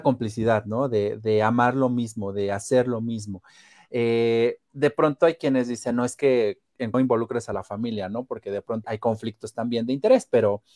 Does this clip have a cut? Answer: yes; 3 cuts; at 4.6 s, 6.9 s, 8.8 s

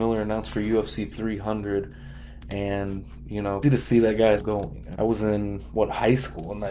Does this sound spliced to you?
yes; 3 cuts; at 3.6 s, 4.4 s, 5.0 s

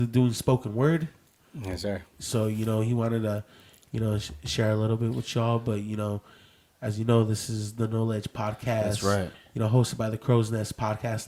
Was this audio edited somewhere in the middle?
no; 0 cuts

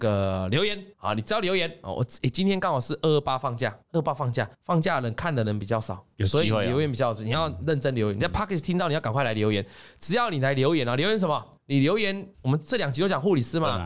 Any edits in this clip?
yes; 6 cuts; at 0.9 s, 3.8 s, 4.5 s, 6.1 s, 11.6 s, 12.3 s

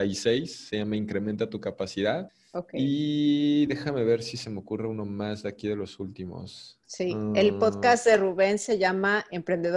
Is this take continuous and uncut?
yes; 0 cuts

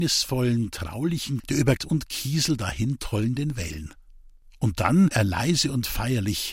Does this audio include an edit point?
yes; 3 cuts; at 1.4 s, 1.8 s, 5.1 s

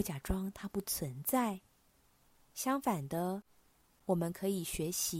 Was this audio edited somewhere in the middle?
no; 0 cuts

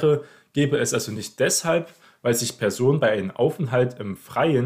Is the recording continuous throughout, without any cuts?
yes; 0 cuts

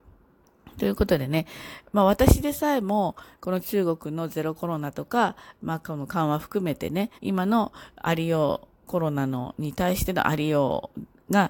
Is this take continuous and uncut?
no; 2 cuts; at 7.2 s, 8.8 s

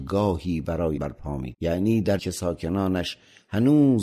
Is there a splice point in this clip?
yes; 3 cuts; at 1.0 s, 1.5 s, 2.2 s

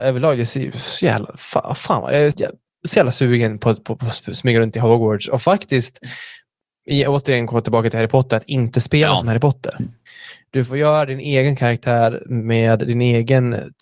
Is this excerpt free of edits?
no; 1 cut; at 2.3 s

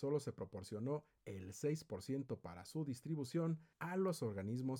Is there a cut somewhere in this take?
no; 0 cuts

